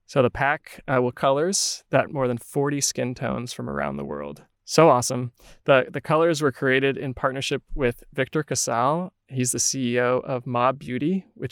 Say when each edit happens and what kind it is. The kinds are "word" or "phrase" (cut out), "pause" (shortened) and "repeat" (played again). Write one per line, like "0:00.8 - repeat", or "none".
0:01.1 - phrase
0:02.1 - word
0:04.5 - pause